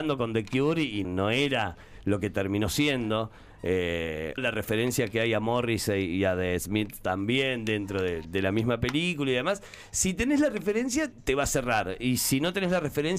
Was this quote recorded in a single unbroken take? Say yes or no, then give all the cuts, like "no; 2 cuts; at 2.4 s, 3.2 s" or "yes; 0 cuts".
no; 4 cuts; at 1.0 s, 4.4 s, 8.2 s, 11.1 s